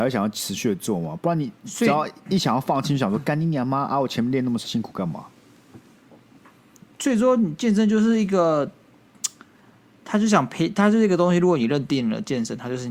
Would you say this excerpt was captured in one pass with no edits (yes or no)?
yes